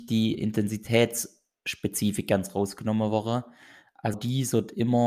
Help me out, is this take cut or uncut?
cut